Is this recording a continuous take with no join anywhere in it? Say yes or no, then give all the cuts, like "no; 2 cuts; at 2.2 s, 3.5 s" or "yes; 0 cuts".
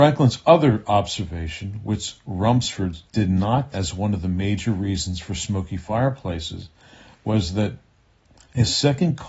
no; 2 cuts; at 3.1 s, 3.7 s